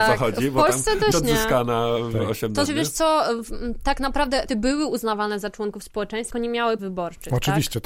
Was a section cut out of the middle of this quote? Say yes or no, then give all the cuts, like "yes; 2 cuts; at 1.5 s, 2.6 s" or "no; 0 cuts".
yes; 5 cuts; at 1.1 s, 2.7 s, 4.5 s, 6.3 s, 6.8 s